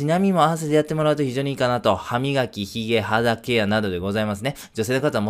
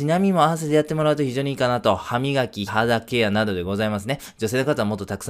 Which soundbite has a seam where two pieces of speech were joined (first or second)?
second